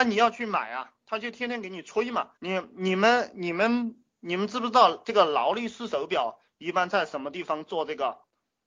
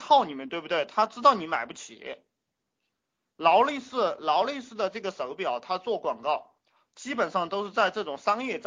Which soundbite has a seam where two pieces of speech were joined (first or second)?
first